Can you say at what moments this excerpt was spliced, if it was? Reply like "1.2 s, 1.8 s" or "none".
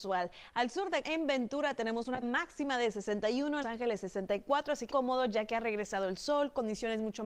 1.0 s, 2.2 s, 3.6 s, 4.9 s